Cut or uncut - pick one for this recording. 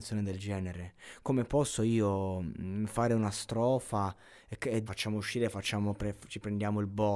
cut